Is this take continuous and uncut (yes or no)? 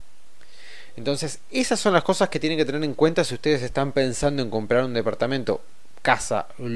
yes